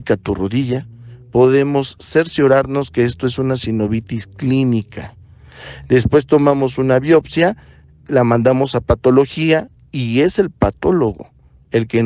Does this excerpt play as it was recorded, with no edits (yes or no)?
yes